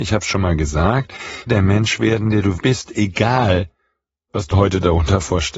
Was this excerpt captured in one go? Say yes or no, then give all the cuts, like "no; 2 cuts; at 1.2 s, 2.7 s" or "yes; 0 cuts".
no; 3 cuts; at 1.5 s, 2.6 s, 4.5 s